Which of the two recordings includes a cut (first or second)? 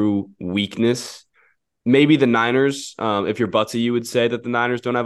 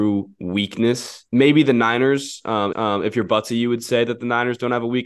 second